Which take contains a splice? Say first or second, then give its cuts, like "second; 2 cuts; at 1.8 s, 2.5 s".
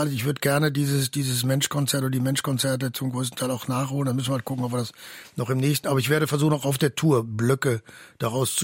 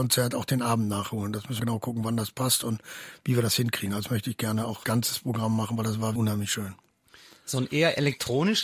second; 3 cuts; at 1.6 s, 4.8 s, 6.2 s